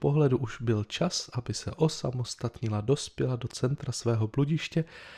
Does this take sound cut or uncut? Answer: uncut